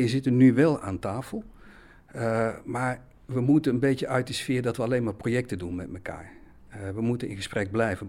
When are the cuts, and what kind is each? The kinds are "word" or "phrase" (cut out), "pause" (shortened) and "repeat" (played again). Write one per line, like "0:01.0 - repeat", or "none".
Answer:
none